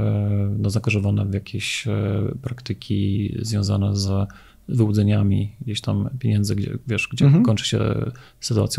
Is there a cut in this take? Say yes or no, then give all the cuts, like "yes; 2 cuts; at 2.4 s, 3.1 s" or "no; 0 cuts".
no; 0 cuts